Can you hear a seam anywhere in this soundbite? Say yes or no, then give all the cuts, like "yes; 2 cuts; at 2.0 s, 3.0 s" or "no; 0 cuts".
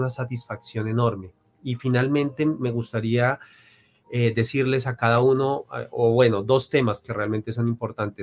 no; 0 cuts